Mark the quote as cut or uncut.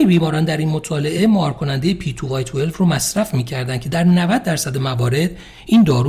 uncut